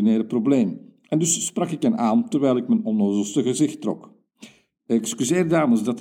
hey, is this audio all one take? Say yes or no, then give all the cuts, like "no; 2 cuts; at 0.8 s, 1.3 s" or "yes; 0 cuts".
yes; 0 cuts